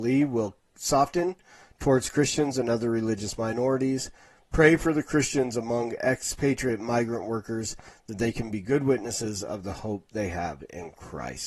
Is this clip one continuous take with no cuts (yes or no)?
yes